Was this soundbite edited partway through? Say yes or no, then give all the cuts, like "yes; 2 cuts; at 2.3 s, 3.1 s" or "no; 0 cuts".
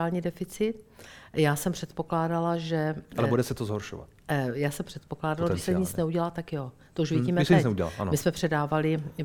no; 0 cuts